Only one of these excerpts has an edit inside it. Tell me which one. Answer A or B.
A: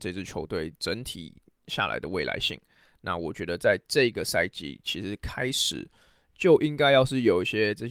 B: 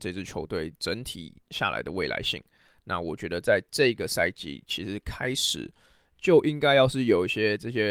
B